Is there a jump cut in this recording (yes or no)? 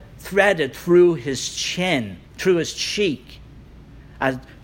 yes